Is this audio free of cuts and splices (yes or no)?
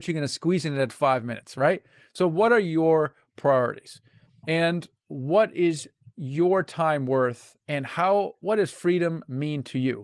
yes